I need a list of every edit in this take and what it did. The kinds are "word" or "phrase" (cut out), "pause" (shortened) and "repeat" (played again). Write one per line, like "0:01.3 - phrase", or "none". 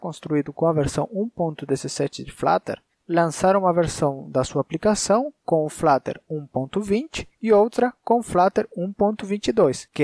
0:02.9 - pause
0:07.3 - pause